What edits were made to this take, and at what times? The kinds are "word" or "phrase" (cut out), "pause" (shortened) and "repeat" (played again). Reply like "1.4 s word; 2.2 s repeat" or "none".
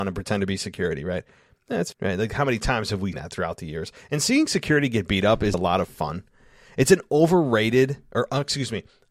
1.9 s word; 3.1 s word; 5.5 s word

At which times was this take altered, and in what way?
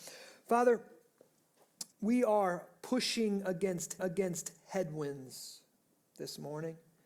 1.9 s pause; 4.0 s repeat

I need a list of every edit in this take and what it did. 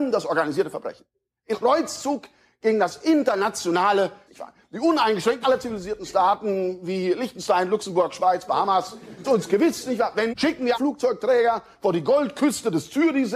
1.5 s word; 4.3 s word; 5.4 s word; 9.2 s word; 10.3 s word; 10.7 s word

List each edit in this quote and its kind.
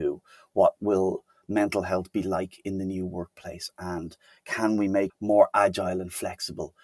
5.1 s phrase

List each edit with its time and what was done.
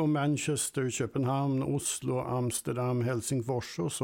none

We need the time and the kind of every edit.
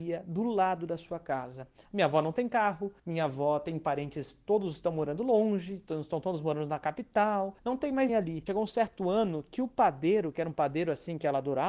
3.0 s pause; 7.6 s pause; 8.1 s word

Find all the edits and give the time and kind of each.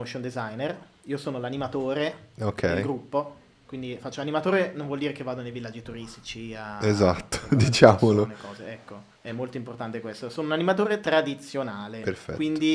9.2 s pause

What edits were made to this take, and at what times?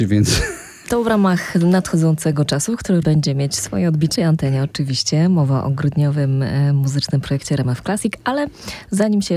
3.0 s word; 4.2 s phrase

